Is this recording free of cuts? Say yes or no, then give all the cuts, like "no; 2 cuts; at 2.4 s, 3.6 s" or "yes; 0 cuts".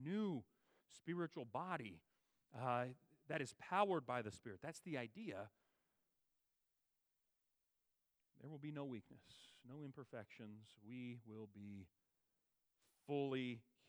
yes; 0 cuts